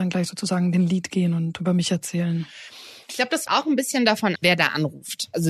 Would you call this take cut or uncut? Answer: cut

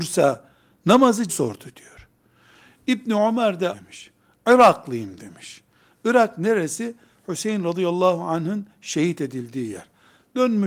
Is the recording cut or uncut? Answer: cut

